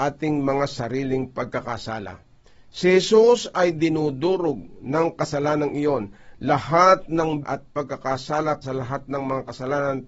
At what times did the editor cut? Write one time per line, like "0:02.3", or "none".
0:07.4
0:08.6